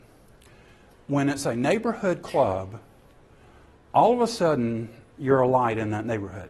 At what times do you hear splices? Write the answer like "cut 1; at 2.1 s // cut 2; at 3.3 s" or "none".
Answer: none